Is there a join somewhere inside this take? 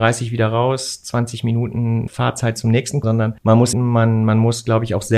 yes; 4 cuts; at 2.1 s, 3.0 s, 3.4 s, 3.7 s

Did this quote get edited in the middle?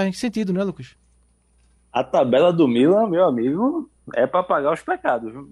no; 0 cuts

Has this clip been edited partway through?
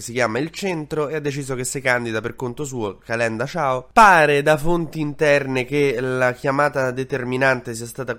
no; 0 cuts

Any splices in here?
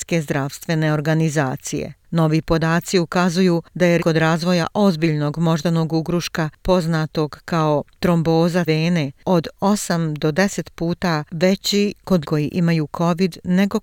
yes; 3 cuts; at 4.0 s, 8.7 s, 12.2 s

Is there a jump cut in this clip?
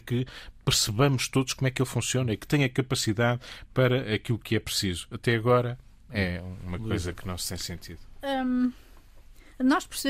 no; 0 cuts

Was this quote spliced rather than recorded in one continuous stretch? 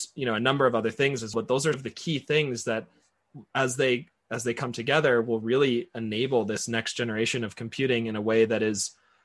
yes; 2 cuts; at 1.3 s, 1.7 s

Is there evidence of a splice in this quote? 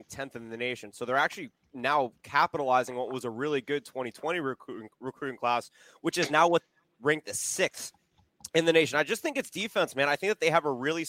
no; 0 cuts

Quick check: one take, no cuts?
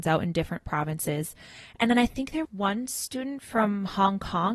no; 1 cut; at 2.4 s

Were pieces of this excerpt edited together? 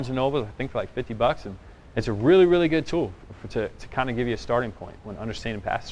no; 0 cuts

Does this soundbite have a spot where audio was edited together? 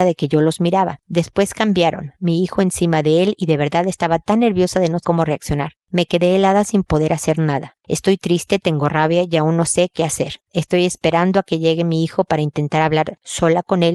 yes; 1 cut; at 5.0 s

